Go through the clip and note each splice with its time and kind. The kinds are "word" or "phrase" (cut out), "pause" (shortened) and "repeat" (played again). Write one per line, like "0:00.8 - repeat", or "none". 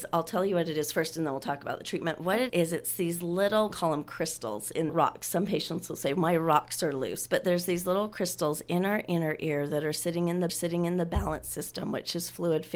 0:02.5 - word
0:03.7 - word
0:04.9 - phrase
0:10.5 - repeat